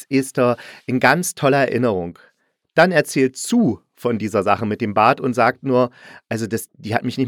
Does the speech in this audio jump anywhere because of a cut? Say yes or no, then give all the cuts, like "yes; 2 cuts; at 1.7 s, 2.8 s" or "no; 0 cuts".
no; 0 cuts